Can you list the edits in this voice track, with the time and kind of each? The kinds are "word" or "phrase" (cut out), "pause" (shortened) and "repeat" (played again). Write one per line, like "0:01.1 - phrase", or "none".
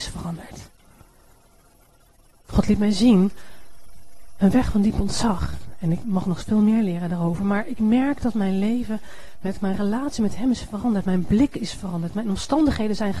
none